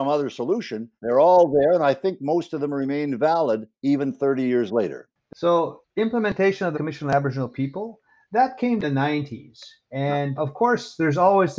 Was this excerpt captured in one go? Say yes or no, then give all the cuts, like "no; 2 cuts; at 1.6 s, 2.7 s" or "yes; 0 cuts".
no; 5 cuts; at 1.0 s, 3.8 s, 6.7 s, 8.8 s, 10.4 s